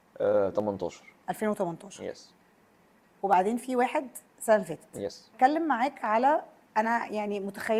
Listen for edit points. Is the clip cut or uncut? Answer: uncut